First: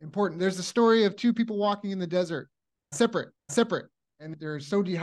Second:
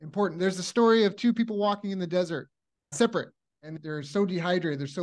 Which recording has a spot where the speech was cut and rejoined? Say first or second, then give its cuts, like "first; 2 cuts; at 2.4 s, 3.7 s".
first; 1 cut; at 3.4 s